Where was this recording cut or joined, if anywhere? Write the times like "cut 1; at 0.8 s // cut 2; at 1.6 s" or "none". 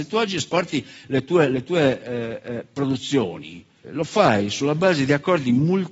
cut 1; at 3.8 s